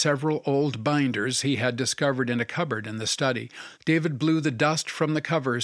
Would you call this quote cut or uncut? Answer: cut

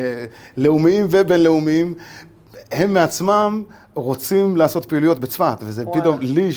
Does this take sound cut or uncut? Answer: uncut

